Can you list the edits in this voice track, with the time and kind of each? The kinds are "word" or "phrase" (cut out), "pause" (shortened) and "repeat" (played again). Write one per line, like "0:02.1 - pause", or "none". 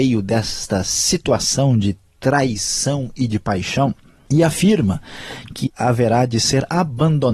0:05.7 - word